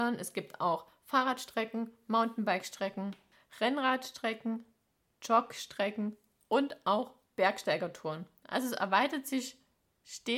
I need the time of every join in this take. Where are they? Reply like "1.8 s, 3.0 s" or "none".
none

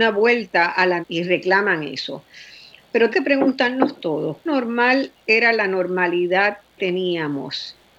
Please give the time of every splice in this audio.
1.0 s, 3.1 s, 4.5 s, 6.8 s

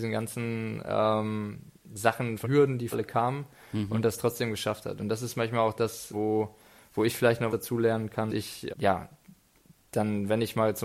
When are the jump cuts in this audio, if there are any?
2.4 s, 2.9 s, 6.1 s, 7.5 s, 8.3 s, 8.7 s

